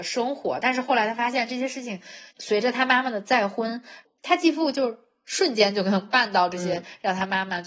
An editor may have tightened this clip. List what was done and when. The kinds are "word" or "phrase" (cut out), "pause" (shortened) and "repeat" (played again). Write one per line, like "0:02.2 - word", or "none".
0:02.3 - pause